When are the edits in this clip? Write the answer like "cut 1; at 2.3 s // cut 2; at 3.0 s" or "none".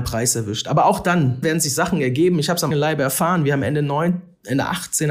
cut 1; at 1.4 s // cut 2; at 2.7 s